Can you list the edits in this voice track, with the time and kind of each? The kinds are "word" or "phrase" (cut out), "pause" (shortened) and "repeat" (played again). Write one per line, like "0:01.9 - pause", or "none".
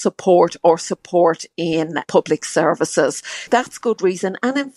0:02.0 - word
0:03.5 - word